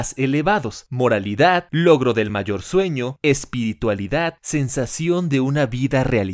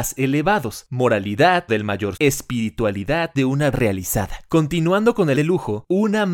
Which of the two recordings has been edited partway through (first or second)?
second